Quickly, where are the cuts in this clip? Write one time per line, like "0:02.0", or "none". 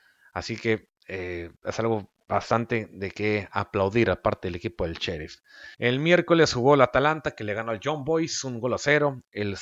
0:01.0
0:02.2
0:05.7